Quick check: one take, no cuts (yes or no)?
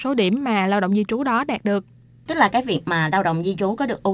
yes